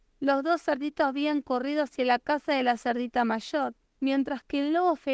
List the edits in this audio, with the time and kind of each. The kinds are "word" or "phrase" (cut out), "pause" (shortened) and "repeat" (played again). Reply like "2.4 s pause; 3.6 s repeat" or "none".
3.8 s pause